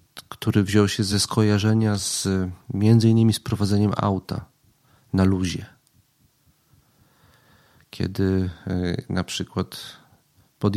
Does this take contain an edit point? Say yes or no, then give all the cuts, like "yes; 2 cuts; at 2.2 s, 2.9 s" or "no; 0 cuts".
no; 0 cuts